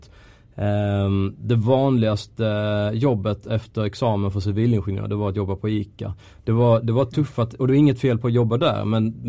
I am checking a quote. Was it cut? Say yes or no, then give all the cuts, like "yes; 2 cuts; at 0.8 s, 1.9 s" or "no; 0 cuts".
no; 0 cuts